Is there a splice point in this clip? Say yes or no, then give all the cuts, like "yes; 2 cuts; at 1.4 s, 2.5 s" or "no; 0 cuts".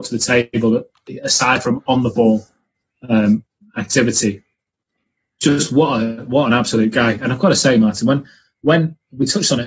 no; 0 cuts